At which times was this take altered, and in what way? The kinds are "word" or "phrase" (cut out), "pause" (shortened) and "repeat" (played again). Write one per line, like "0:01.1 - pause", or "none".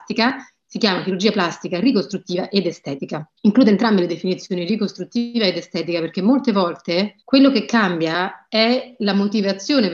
0:03.4 - pause
0:07.2 - pause